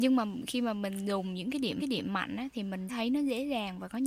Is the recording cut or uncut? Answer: cut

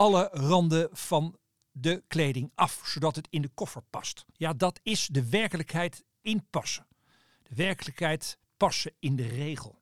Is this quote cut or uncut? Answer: cut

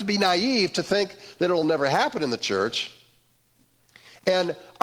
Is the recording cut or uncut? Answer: uncut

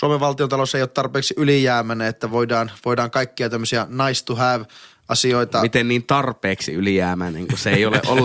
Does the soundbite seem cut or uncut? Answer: uncut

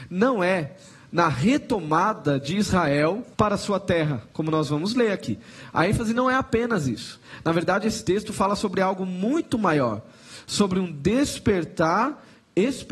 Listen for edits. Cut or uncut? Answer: cut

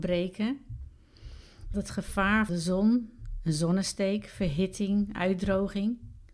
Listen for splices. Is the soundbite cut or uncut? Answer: cut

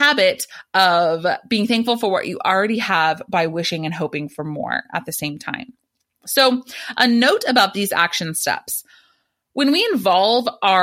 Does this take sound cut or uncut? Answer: uncut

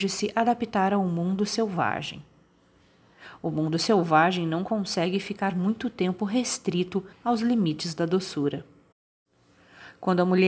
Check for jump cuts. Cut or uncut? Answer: cut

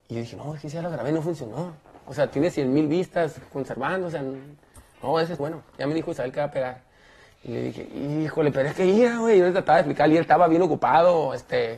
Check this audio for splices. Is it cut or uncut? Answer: cut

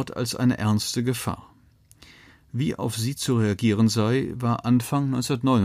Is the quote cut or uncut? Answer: uncut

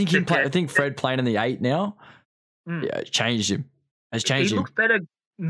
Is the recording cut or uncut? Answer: uncut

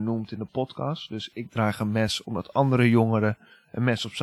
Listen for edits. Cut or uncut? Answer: uncut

